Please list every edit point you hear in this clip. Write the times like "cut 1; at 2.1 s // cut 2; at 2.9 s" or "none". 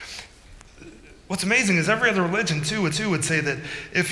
cut 1; at 2.9 s